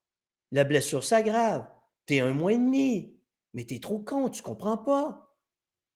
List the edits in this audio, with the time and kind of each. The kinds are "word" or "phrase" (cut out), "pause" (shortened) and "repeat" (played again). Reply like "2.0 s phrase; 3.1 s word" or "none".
none